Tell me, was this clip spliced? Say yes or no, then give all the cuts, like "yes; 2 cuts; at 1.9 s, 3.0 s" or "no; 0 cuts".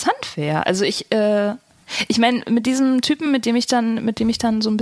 no; 0 cuts